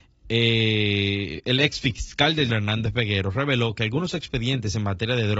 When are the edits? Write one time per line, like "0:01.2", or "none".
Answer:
0:02.5